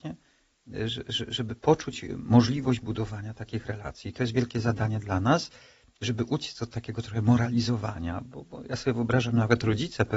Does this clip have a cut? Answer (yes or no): no